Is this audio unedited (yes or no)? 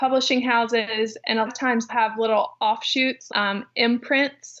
no